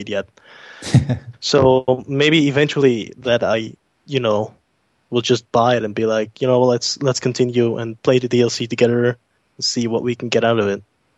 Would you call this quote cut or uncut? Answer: uncut